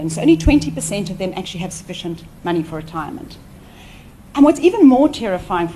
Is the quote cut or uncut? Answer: uncut